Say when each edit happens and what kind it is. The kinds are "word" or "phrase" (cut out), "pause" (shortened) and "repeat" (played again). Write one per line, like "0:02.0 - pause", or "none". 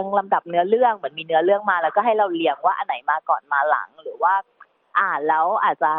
none

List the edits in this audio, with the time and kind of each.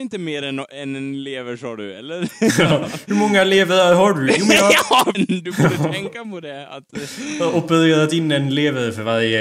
0:05.1 - phrase

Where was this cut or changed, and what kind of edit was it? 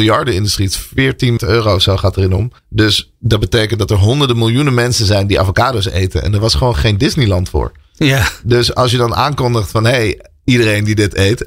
0:01.4 - word
0:02.6 - pause

